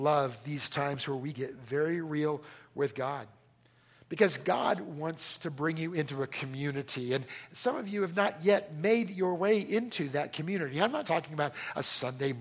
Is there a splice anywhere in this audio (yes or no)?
yes